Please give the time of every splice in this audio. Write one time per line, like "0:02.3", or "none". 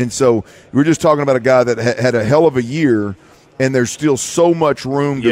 none